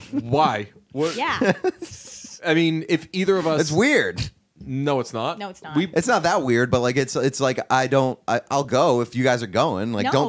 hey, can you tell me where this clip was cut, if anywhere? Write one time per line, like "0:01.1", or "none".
none